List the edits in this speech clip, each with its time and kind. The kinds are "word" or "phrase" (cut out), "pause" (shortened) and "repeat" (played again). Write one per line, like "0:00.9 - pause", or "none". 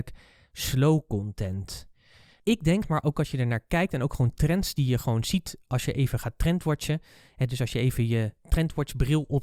none